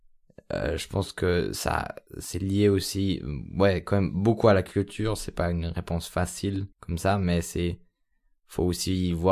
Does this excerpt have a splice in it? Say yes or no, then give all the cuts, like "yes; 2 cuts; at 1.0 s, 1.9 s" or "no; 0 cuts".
yes; 2 cuts; at 2.1 s, 6.7 s